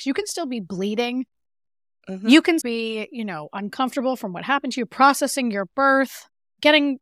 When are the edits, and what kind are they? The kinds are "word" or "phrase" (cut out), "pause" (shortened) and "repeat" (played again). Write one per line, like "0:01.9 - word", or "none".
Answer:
0:02.6 - word